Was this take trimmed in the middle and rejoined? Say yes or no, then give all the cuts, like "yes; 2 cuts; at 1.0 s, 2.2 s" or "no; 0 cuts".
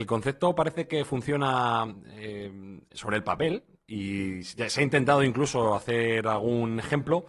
no; 0 cuts